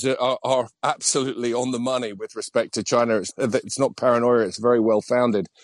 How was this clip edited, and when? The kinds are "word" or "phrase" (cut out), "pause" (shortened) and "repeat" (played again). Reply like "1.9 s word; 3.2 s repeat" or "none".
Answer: 3.3 s word